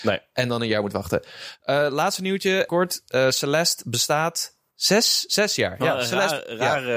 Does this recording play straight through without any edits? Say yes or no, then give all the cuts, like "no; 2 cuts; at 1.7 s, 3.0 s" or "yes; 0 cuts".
no; 2 cuts; at 2.7 s, 4.7 s